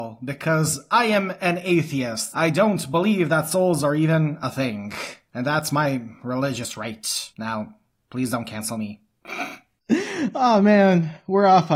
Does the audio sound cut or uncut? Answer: cut